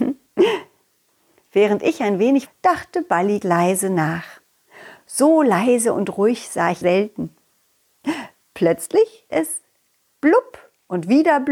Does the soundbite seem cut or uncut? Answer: cut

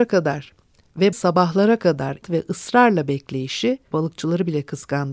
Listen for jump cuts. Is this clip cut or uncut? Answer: cut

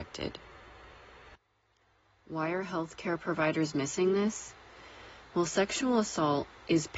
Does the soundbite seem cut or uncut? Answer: uncut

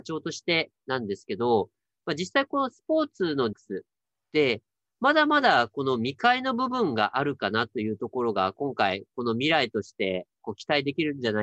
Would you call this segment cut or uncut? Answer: cut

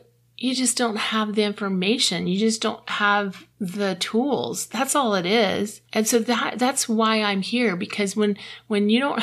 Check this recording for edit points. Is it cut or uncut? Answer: cut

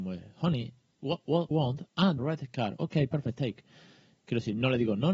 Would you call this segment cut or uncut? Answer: cut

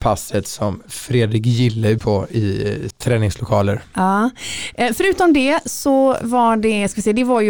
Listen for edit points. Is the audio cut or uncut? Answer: cut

